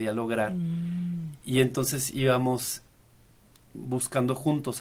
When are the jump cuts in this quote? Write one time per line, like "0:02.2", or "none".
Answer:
none